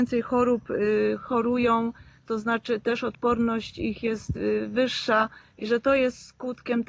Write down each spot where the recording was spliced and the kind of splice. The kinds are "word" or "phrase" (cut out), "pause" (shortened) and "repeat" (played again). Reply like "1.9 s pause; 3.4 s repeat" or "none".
none